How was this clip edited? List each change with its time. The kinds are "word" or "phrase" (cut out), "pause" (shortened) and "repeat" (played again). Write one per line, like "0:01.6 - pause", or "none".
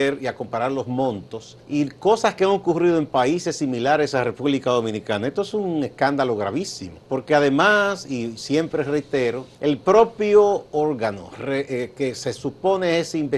0:01.6 - pause
0:07.0 - pause
0:09.5 - pause
0:10.7 - pause